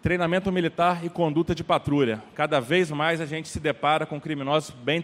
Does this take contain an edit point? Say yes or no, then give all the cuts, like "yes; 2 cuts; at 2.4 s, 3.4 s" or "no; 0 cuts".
no; 0 cuts